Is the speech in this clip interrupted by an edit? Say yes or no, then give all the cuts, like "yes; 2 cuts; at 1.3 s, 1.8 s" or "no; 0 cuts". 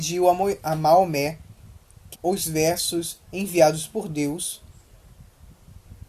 yes; 1 cut; at 2.1 s